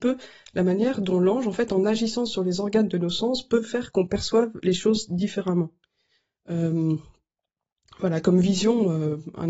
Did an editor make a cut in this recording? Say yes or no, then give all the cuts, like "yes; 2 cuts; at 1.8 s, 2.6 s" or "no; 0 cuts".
no; 0 cuts